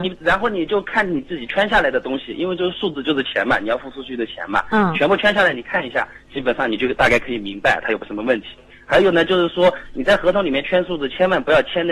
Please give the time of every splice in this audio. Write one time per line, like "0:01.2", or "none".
none

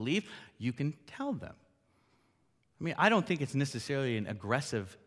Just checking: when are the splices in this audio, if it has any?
none

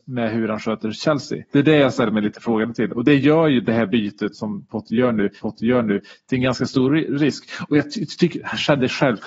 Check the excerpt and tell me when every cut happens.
0:01.5
0:04.3
0:05.4

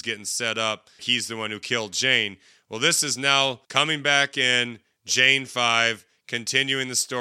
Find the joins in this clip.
0:01.0
0:03.6

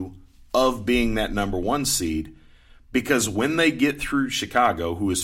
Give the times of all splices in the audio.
none

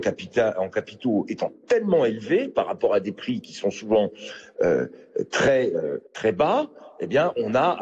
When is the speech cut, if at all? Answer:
0:06.1

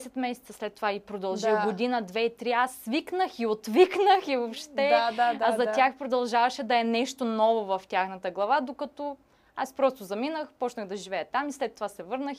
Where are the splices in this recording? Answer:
none

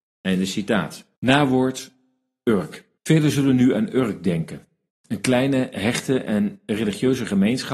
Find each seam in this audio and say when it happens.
0:01.1
0:03.0
0:04.9

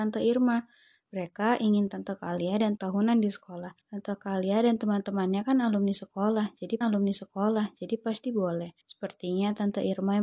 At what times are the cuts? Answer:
0:02.8
0:03.8
0:06.8
0:08.8

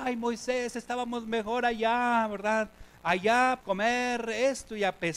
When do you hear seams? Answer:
0:03.6

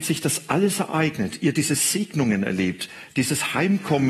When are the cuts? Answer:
none

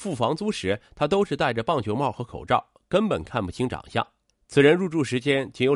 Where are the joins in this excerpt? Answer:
0:04.3

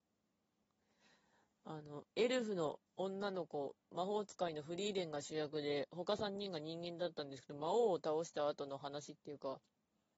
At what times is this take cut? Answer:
0:02.1
0:02.9
0:03.8

